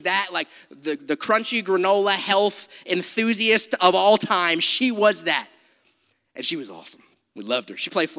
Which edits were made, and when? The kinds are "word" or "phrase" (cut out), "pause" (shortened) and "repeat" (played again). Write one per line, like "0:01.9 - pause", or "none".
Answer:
0:01.0 - word